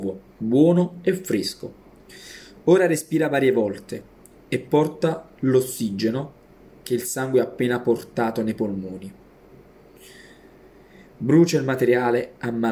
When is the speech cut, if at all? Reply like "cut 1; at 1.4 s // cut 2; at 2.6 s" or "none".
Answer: none